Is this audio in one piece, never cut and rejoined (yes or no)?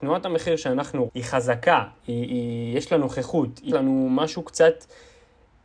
no